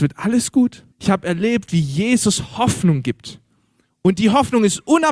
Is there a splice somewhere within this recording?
yes; 1 cut; at 0.9 s

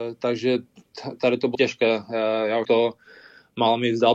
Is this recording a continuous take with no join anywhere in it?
no; 2 cuts; at 1.5 s, 2.6 s

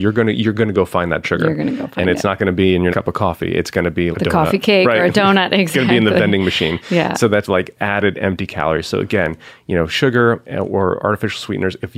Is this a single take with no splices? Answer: no; 4 cuts; at 1.2 s, 2.9 s, 4.1 s, 7.4 s

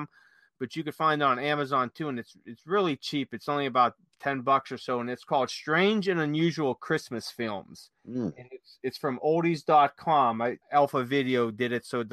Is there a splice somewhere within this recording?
yes; 2 cuts; at 8.0 s, 10.6 s

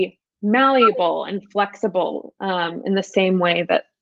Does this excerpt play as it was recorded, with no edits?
yes; 0 cuts

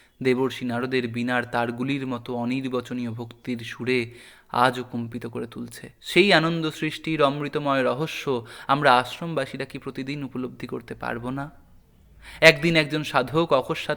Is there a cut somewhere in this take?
yes; 1 cut; at 6.0 s

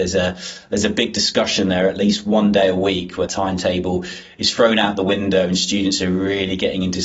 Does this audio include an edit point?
yes; 1 cut; at 3.3 s

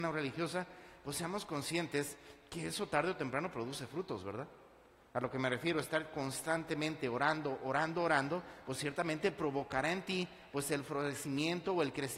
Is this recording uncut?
yes; 0 cuts

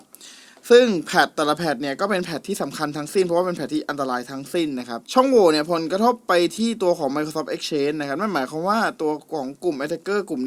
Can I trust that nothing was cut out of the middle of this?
no; 1 cut; at 5.0 s

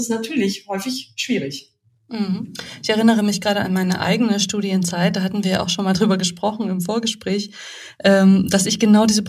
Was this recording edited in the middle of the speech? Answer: no; 0 cuts

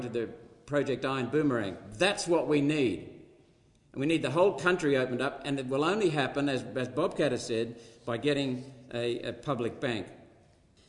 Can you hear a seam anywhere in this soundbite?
no; 0 cuts

